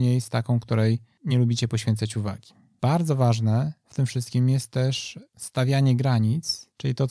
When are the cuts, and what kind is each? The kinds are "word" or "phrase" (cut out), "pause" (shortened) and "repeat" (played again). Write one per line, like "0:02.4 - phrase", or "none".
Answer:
none